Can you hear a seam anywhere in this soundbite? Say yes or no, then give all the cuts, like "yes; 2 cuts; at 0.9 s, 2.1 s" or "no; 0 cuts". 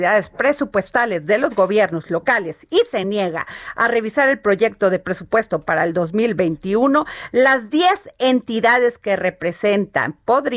no; 0 cuts